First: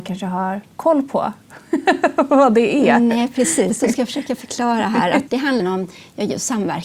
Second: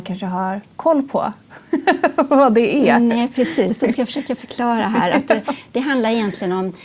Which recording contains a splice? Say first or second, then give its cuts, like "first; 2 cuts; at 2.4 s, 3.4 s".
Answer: first; 2 cuts; at 5.3 s, 5.6 s